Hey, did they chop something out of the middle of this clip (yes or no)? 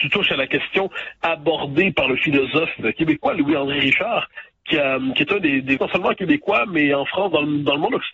yes